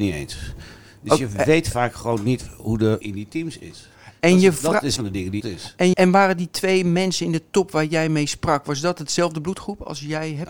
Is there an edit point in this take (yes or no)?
yes